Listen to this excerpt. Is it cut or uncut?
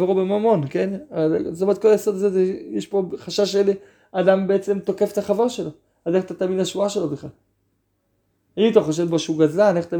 uncut